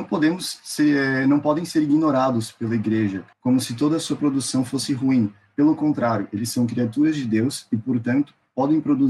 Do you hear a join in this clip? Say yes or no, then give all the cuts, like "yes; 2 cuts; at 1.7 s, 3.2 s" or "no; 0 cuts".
yes; 1 cut; at 3.3 s